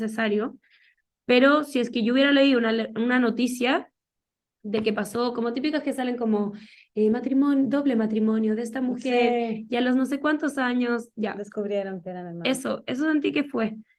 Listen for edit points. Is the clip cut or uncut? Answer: uncut